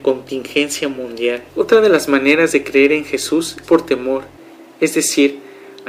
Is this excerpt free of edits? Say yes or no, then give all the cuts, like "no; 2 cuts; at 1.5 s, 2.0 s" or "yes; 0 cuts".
no; 2 cuts; at 1.5 s, 3.6 s